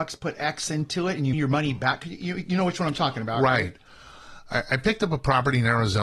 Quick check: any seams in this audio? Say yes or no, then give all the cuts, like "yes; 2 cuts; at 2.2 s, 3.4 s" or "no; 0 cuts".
yes; 1 cut; at 1.3 s